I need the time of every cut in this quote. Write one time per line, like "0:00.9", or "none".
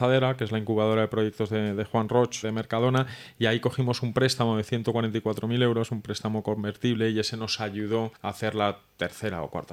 0:02.4
0:08.2